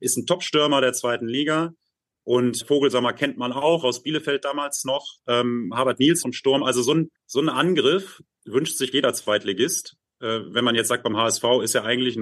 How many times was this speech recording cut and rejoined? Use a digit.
5